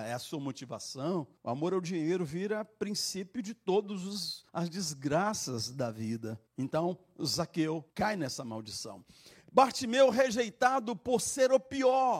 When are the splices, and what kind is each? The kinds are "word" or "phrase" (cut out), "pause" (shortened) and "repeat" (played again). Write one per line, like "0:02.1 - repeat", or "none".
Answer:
0:01.4 - pause
0:04.5 - pause
0:06.5 - pause
0:07.9 - pause